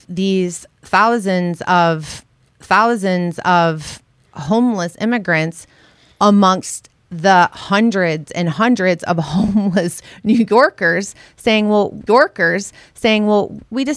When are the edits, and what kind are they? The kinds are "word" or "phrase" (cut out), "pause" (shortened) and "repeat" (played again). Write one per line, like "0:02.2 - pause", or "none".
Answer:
0:02.5 - repeat
0:12.1 - repeat